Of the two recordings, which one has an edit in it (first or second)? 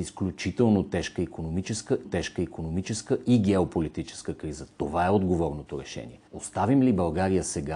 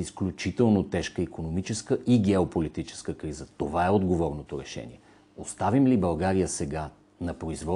first